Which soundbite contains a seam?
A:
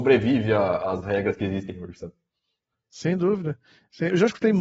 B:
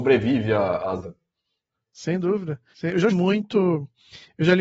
B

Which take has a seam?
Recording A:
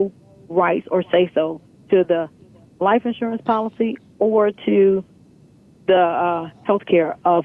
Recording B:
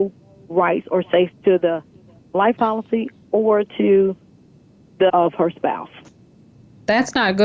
B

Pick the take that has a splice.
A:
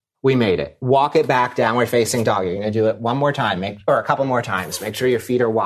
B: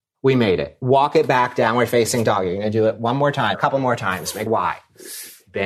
B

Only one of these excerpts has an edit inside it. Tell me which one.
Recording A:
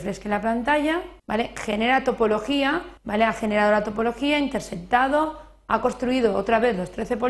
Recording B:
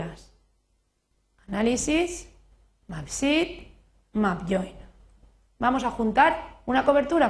A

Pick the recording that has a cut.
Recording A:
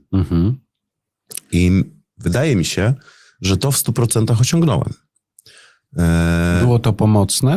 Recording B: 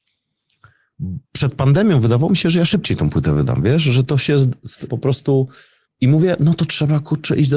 B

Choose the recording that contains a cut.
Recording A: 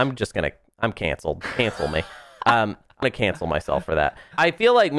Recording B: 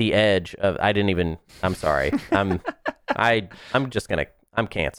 A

